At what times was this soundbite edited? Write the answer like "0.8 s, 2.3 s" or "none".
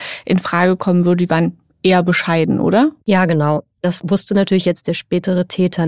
none